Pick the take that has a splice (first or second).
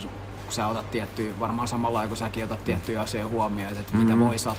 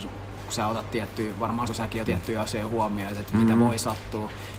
second